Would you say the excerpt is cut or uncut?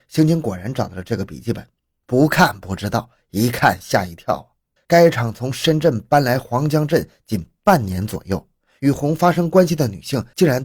cut